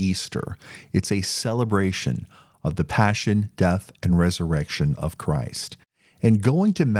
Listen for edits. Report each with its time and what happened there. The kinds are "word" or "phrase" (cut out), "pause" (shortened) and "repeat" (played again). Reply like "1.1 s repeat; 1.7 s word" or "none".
none